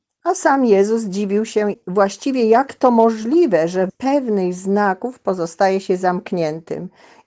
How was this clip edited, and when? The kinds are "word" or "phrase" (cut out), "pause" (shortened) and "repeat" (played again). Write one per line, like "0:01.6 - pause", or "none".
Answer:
0:01.7 - phrase
0:03.9 - word